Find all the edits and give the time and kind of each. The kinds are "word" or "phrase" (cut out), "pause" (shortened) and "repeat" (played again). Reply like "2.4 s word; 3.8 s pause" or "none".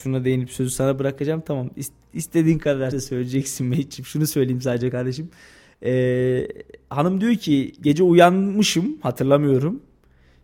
2.9 s word

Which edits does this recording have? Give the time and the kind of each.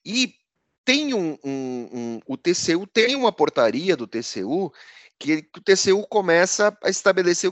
none

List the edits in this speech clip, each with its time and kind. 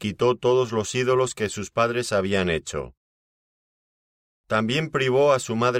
none

